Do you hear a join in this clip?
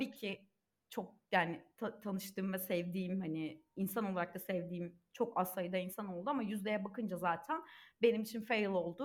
yes; 1 cut; at 1.2 s

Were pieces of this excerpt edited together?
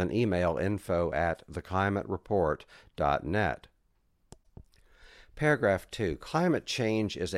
no; 0 cuts

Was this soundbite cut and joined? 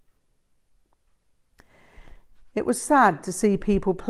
no; 0 cuts

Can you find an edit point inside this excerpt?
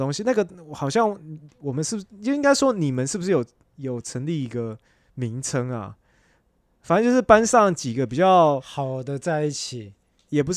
no; 0 cuts

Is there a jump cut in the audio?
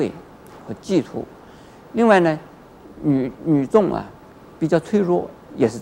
yes; 1 cut; at 4.2 s

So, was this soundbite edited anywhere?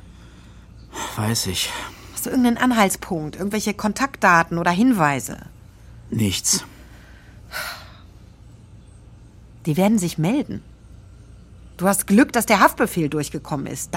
no; 0 cuts

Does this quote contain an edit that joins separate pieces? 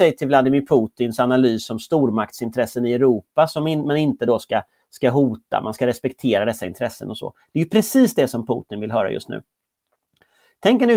no; 0 cuts

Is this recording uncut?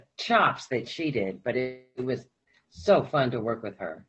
yes; 0 cuts

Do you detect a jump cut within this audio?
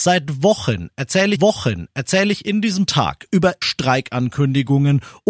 yes; 3 cuts; at 1.4 s, 2.9 s, 3.6 s

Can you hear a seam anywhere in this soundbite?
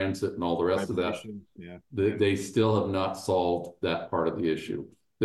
no; 0 cuts

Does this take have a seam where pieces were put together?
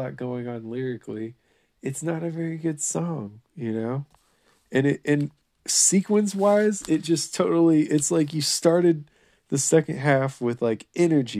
no; 0 cuts

